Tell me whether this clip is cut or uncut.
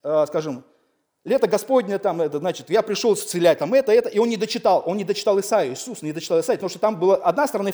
uncut